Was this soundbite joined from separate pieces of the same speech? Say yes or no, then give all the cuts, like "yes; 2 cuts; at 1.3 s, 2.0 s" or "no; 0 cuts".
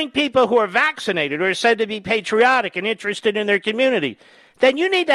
no; 0 cuts